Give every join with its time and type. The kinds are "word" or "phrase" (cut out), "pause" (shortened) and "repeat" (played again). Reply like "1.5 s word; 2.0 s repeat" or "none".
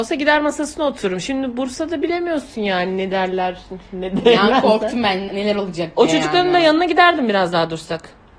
5.3 s word